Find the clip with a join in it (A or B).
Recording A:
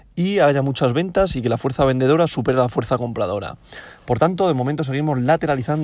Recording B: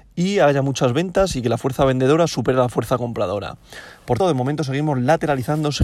B